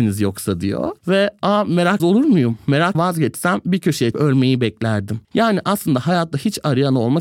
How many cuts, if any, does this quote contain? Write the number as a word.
five